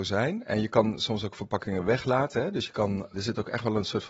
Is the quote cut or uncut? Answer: cut